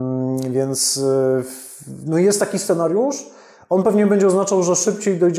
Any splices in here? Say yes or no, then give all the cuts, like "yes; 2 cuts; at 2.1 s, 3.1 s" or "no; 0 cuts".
no; 0 cuts